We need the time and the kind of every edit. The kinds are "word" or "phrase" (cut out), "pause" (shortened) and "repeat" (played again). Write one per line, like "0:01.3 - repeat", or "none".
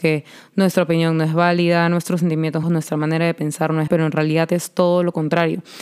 0:02.6 - phrase
0:03.9 - word